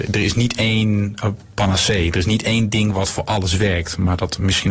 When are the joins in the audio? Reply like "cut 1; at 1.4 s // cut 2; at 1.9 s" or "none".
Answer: none